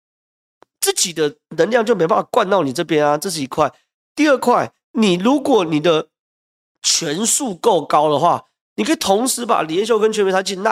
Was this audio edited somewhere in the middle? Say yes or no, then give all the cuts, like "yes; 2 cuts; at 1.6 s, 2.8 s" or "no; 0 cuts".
yes; 1 cut; at 4.8 s